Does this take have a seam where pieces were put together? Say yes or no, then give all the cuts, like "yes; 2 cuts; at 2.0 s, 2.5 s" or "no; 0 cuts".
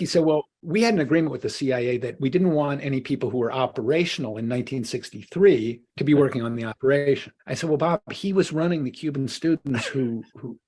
yes; 2 cuts; at 5.9 s, 7.4 s